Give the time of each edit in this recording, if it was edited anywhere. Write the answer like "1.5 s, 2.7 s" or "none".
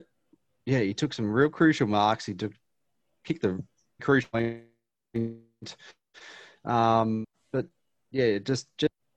4.0 s